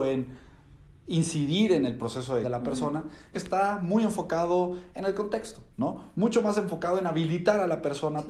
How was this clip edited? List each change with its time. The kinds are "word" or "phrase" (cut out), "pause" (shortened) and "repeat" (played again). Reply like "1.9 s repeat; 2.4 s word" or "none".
2.4 s word; 3.3 s phrase; 5.7 s pause